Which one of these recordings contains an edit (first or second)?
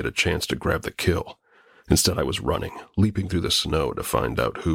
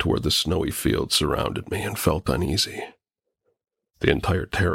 second